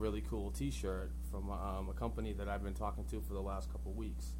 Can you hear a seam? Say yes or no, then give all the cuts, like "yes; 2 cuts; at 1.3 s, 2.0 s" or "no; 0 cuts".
no; 0 cuts